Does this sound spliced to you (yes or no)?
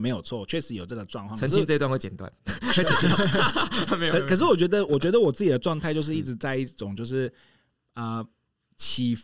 no